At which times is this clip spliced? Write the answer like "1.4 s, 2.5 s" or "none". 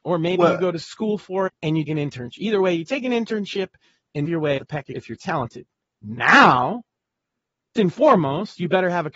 1.5 s, 1.9 s, 4.2 s, 4.6 s, 4.9 s, 7.7 s

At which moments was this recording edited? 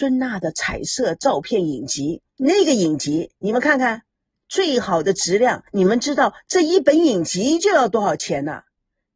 2.3 s, 5.7 s

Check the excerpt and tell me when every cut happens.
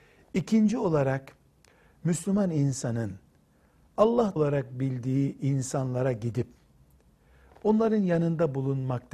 4.4 s

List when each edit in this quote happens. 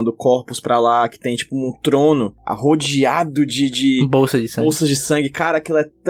none

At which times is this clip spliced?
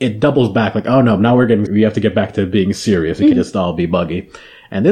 1.7 s, 3.3 s

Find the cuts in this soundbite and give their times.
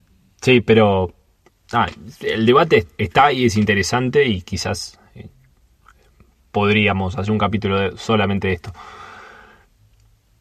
1.4 s

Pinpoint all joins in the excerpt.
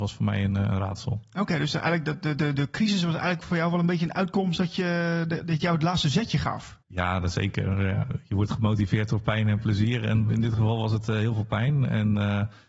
6.8 s

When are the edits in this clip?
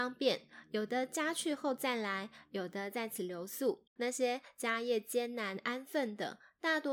3.9 s

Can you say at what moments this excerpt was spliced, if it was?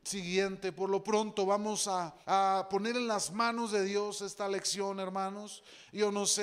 2.2 s

